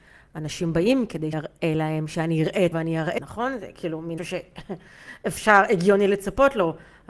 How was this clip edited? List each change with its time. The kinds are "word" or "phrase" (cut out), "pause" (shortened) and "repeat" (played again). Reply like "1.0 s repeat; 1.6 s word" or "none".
1.3 s word; 2.7 s word; 3.2 s word; 4.2 s word